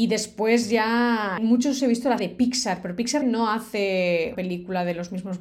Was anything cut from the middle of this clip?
yes; 5 cuts; at 1.4 s, 1.8 s, 2.2 s, 3.2 s, 4.3 s

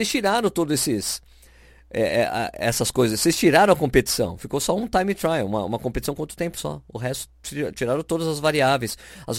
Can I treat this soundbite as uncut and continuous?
yes; 0 cuts

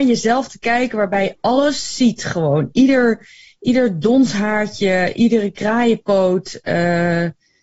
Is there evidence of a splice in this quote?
no; 0 cuts

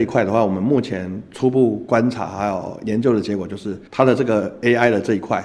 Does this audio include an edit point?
yes; 1 cut; at 3.9 s

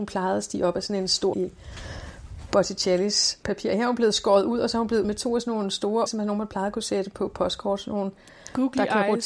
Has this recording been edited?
yes; 4 cuts; at 1.3 s, 3.4 s, 5.0 s, 6.1 s

